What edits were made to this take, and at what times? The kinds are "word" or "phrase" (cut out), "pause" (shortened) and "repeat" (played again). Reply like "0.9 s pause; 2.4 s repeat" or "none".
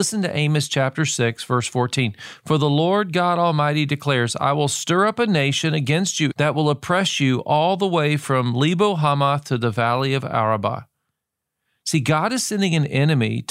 6.3 s word

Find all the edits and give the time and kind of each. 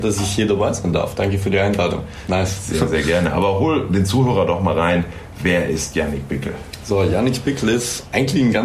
none

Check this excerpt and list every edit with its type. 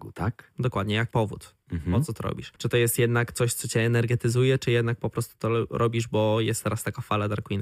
1.1 s word; 2.6 s pause

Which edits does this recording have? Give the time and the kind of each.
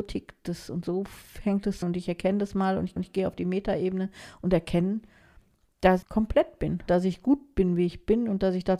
1.8 s word; 3.0 s repeat; 6.0 s word; 6.9 s word

